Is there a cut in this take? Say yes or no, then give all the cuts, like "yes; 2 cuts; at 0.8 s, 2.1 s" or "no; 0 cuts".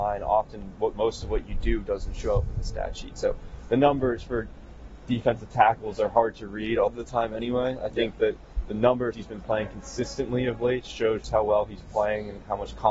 yes; 3 cuts; at 6.9 s, 9.1 s, 11.2 s